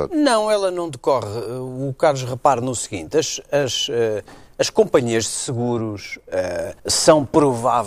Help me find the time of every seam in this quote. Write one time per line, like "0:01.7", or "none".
0:06.8